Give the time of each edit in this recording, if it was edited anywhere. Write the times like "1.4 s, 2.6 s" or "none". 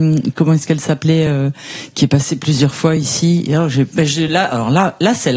none